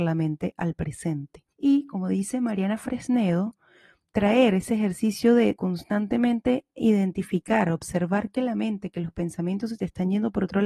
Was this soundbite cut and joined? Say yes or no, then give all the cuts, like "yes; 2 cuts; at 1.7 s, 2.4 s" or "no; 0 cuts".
yes; 2 cuts; at 1.5 s, 5.6 s